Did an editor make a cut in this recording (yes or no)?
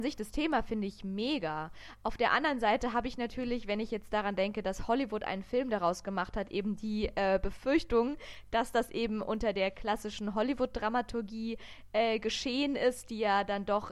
no